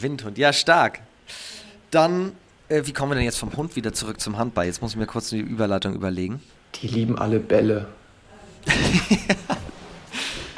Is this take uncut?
yes; 0 cuts

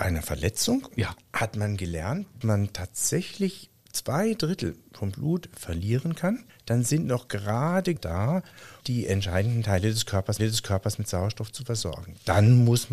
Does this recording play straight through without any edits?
no; 6 cuts; at 0.9 s, 2.4 s, 6.5 s, 8.0 s, 8.8 s, 10.4 s

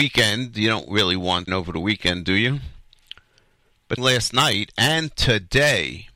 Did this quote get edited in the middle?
yes; 2 cuts; at 1.5 s, 4.0 s

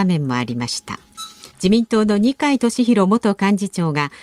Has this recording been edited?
yes; 1 cut; at 1.5 s

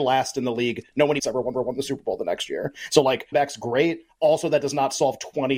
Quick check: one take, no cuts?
no; 3 cuts; at 1.2 s, 1.5 s, 3.3 s

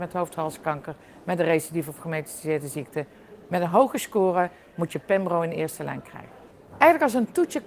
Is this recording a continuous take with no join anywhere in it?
yes; 0 cuts

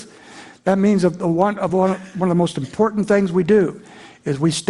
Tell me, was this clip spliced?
no; 0 cuts

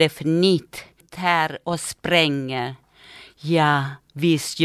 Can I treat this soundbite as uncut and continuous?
no; 1 cut; at 1.0 s

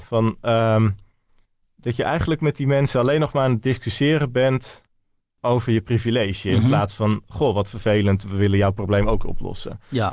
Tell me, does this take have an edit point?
no; 0 cuts

